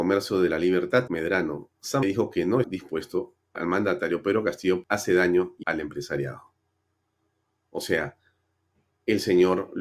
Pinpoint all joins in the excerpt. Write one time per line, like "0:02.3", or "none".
0:01.1
0:02.0
0:02.6
0:03.6
0:04.8
0:05.6